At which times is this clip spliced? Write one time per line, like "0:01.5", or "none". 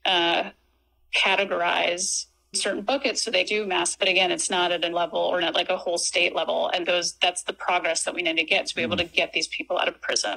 0:02.5
0:03.5
0:03.9
0:04.9
0:05.4
0:06.8
0:08.7